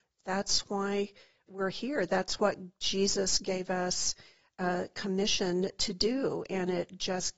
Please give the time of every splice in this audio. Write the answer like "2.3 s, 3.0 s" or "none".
none